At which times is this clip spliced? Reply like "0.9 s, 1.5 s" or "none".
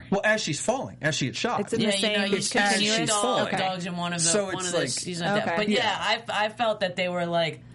none